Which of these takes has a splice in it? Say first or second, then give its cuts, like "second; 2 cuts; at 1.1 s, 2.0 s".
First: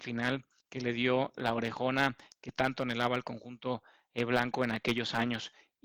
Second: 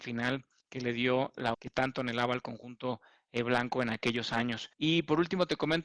second; 2 cuts; at 1.5 s, 4.7 s